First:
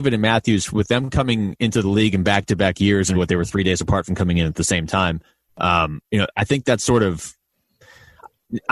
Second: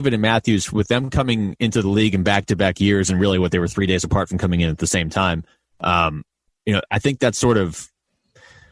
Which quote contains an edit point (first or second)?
first